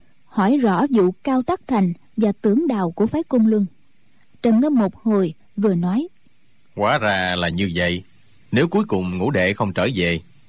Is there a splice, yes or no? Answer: no